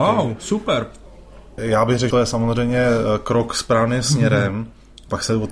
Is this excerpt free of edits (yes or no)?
no